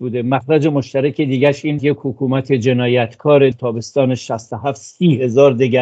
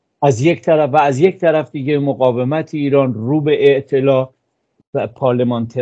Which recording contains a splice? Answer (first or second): first